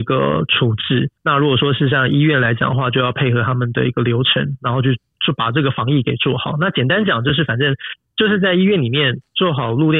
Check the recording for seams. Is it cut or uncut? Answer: cut